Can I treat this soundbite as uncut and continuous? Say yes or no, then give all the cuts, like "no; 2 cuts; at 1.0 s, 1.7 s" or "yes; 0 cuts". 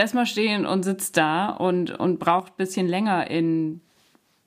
yes; 0 cuts